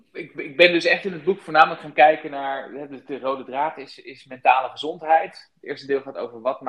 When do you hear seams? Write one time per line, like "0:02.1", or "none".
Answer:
none